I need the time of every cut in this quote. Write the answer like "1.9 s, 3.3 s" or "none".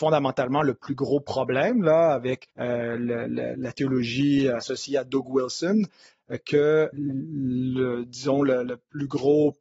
2.5 s, 3.5 s, 6.9 s